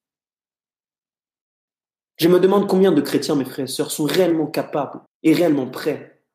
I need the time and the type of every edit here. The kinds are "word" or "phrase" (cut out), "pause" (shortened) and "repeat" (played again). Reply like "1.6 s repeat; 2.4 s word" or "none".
5.1 s pause